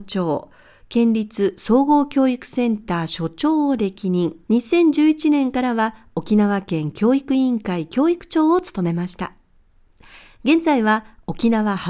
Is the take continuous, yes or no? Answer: no